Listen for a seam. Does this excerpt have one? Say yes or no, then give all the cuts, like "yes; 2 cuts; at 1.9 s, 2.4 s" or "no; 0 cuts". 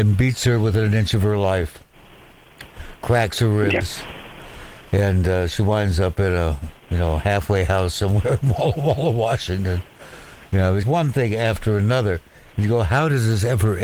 yes; 1 cut; at 10.8 s